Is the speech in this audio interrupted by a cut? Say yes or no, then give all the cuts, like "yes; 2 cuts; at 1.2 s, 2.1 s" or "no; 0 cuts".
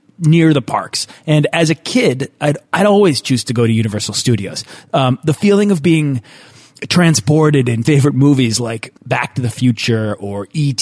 yes; 3 cuts; at 2.7 s, 7.8 s, 9.0 s